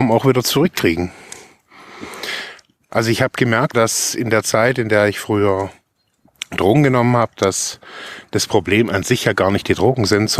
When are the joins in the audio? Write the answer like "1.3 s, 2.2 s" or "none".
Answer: 3.7 s